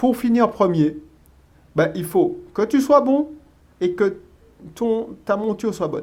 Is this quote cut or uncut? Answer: uncut